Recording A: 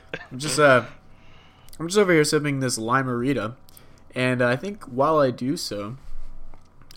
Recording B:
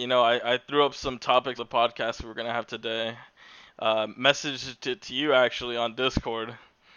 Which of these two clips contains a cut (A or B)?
B